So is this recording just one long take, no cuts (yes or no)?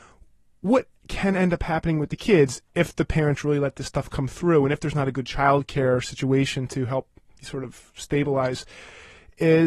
yes